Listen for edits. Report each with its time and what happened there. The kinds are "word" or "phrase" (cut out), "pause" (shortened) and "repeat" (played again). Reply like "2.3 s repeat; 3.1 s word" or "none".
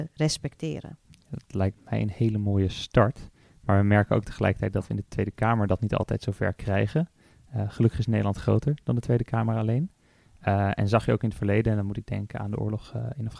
none